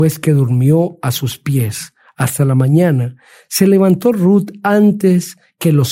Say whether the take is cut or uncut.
uncut